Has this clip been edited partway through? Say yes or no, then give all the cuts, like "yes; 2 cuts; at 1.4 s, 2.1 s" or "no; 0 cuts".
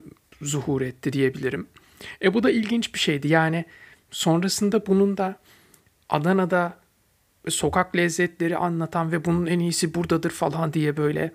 no; 0 cuts